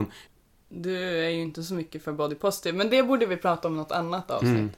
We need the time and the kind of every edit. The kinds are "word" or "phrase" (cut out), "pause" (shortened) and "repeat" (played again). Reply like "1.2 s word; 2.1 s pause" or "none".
none